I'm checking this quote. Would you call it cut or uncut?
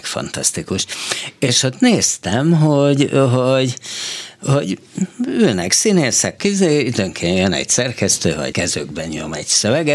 cut